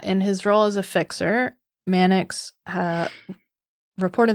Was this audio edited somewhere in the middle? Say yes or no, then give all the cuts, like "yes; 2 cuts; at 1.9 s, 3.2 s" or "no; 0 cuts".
no; 0 cuts